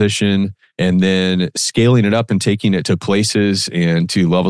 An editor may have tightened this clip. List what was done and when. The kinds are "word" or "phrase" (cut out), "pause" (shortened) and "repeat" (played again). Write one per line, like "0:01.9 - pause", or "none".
none